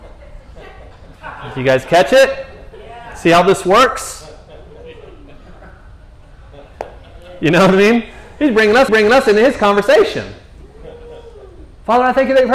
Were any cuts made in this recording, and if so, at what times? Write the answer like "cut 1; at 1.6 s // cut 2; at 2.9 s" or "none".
cut 1; at 8.9 s

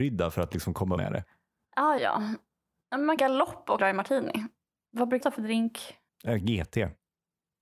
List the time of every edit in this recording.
cut 1; at 1.0 s // cut 2; at 2.0 s // cut 3; at 3.2 s // cut 4; at 3.8 s // cut 5; at 4.6 s // cut 6; at 5.2 s // cut 7; at 6.1 s

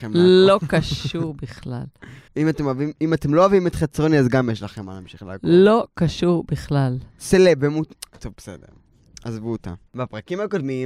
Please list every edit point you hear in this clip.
cut 1; at 2.3 s // cut 2; at 7.1 s // cut 3; at 9.9 s

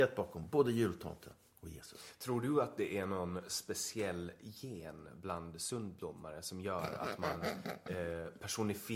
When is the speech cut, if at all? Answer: none

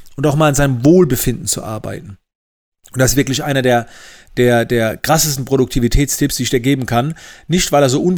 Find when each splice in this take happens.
none

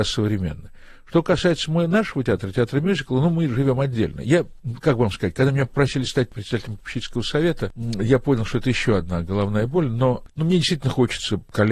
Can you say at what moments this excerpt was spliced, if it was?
none

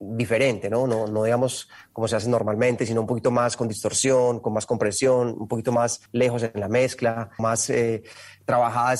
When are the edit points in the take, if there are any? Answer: cut 1; at 6.1 s // cut 2; at 7.4 s

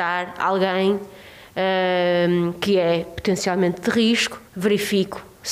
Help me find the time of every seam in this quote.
cut 1; at 4.5 s

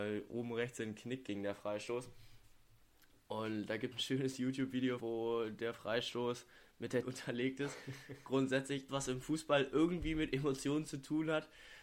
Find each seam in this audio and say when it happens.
cut 1; at 3.9 s // cut 2; at 5.0 s // cut 3; at 7.0 s // cut 4; at 8.9 s

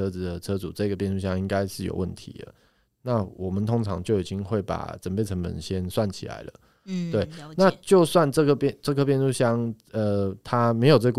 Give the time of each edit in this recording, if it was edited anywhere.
none

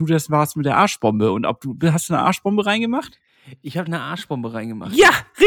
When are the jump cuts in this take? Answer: cut 1; at 3.9 s

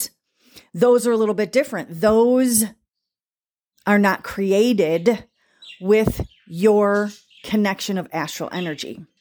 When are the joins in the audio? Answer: none

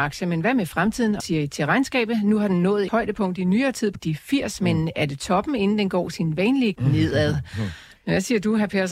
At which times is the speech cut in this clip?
cut 1; at 1.2 s // cut 2; at 2.9 s // cut 3; at 3.9 s // cut 4; at 6.7 s

